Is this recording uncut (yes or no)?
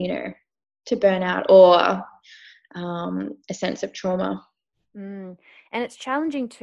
yes